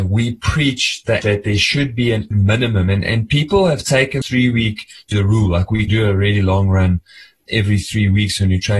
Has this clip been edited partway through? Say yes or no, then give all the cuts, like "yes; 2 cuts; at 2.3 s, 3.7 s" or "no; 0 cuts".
yes; 6 cuts; at 1.2 s, 2.3 s, 4.2 s, 5.1 s, 5.9 s, 7.5 s